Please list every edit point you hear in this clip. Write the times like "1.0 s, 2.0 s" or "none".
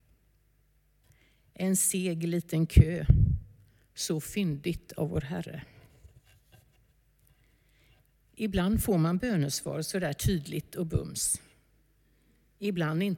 none

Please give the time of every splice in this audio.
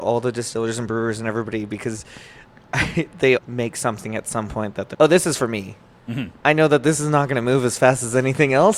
3.4 s, 4.9 s

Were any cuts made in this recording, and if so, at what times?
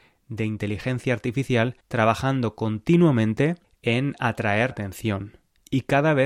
1.8 s, 3.6 s, 4.7 s

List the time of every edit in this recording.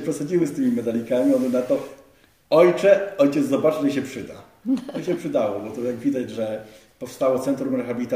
none

